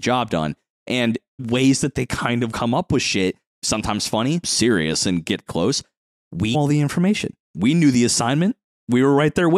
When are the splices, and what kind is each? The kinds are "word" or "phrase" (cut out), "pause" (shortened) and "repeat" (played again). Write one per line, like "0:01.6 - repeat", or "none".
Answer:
0:01.4 - word
0:02.5 - word
0:04.4 - word
0:05.5 - word
0:06.5 - word